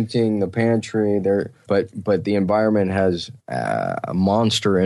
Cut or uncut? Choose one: cut